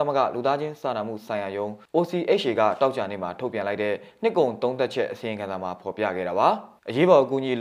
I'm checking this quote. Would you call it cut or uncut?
uncut